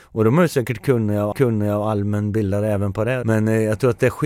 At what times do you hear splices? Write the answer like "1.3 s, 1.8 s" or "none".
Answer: 1.3 s